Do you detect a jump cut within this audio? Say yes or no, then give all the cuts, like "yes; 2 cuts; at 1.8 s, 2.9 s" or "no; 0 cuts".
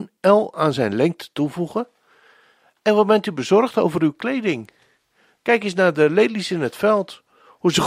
no; 0 cuts